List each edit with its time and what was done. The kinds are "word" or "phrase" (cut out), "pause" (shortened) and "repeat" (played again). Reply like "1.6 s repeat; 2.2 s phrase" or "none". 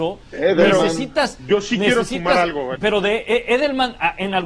2.7 s word